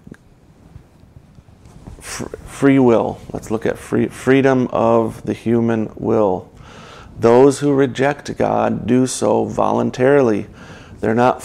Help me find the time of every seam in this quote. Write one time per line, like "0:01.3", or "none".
none